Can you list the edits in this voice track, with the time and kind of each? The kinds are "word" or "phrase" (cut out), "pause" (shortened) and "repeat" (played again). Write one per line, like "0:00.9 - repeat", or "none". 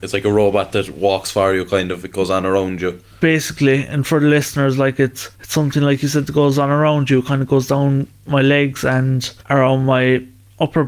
0:05.3 - pause
0:09.4 - pause